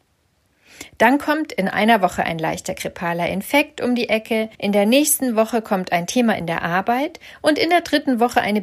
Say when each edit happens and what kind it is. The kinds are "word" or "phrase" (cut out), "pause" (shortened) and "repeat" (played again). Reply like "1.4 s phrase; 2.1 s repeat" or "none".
4.5 s pause